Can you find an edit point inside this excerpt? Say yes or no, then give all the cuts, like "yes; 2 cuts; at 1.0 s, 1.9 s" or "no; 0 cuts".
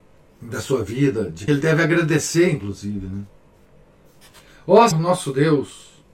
yes; 2 cuts; at 1.5 s, 4.9 s